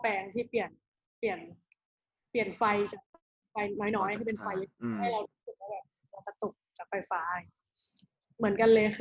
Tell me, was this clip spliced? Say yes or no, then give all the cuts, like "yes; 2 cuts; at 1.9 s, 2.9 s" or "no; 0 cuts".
no; 0 cuts